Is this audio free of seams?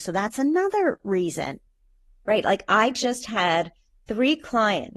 yes; 0 cuts

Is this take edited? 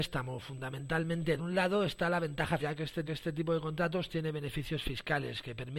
yes; 3 cuts; at 1.4 s, 2.6 s, 3.1 s

